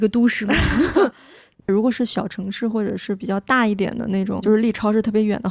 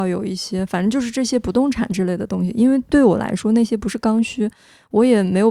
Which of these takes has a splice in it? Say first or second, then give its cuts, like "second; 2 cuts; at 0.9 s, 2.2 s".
first; 1 cut; at 4.4 s